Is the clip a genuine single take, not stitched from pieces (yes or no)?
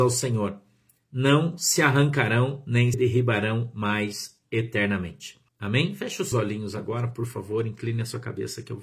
no